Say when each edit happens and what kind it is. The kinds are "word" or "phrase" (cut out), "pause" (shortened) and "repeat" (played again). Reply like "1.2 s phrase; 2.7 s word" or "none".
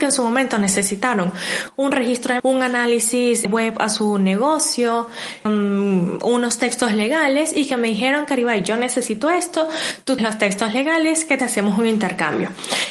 2.4 s word; 3.4 s word; 5.5 s word; 10.2 s word; 11.4 s phrase